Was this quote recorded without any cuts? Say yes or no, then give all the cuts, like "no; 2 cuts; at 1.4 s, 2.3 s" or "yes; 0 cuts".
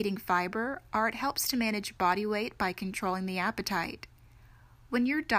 yes; 0 cuts